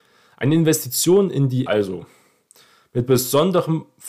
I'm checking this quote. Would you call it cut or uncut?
cut